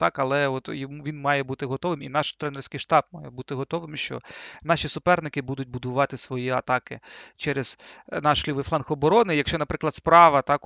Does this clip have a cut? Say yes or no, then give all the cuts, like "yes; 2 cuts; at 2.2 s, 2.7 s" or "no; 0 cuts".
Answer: no; 0 cuts